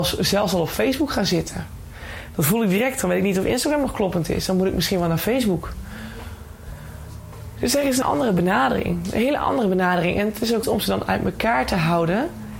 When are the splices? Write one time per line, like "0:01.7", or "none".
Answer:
0:08.0
0:10.6